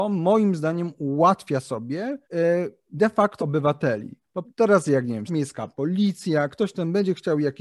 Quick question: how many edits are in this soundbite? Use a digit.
4